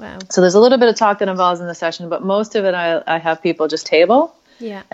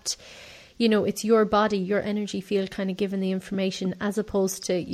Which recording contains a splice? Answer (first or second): first